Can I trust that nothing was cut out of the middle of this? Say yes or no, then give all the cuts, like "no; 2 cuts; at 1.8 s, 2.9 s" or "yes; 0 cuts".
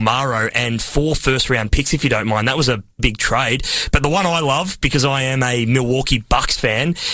no; 1 cut; at 3.0 s